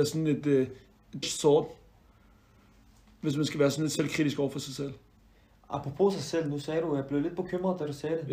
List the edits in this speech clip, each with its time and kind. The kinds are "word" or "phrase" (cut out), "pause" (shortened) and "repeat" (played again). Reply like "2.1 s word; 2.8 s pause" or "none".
1.2 s word